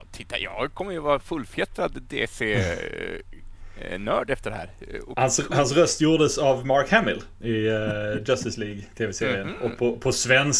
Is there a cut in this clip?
no; 0 cuts

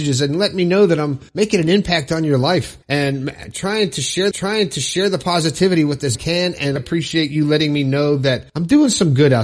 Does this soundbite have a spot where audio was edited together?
yes; 6 cuts; at 1.3 s, 2.8 s, 4.3 s, 6.1 s, 6.8 s, 8.5 s

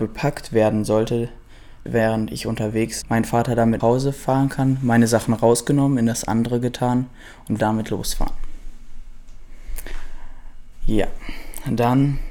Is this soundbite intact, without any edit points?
no; 4 cuts; at 1.9 s, 3.0 s, 3.8 s, 7.6 s

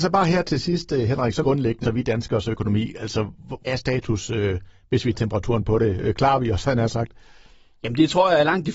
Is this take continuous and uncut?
no; 4 cuts; at 1.4 s, 1.8 s, 3.7 s, 5.1 s

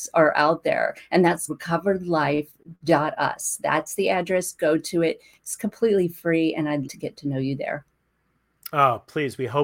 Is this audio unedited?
no; 2 cuts; at 1.5 s, 6.8 s

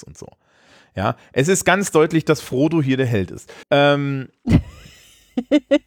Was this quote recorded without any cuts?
no; 1 cut; at 3.6 s

